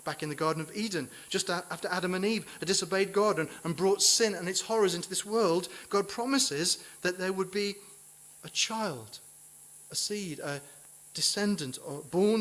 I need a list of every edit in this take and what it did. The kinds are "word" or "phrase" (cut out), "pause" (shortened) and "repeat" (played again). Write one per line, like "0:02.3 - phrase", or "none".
none